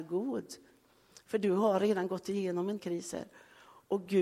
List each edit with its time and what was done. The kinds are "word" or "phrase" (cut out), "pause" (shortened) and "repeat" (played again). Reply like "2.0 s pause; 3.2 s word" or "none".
2.8 s word